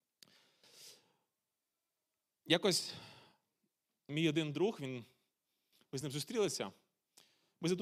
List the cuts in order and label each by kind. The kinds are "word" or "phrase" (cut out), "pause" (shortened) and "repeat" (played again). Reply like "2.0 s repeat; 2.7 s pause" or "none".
none